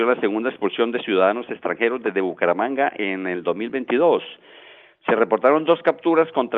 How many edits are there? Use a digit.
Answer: 0